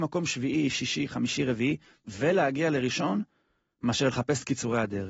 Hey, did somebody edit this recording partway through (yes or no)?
no